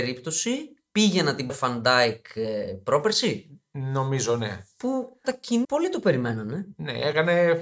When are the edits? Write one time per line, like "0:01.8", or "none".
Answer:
0:01.5
0:05.2
0:05.6